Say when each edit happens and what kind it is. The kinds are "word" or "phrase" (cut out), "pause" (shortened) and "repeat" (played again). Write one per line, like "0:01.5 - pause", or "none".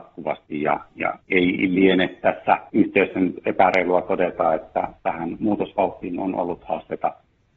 0:01.2 - pause
0:02.7 - pause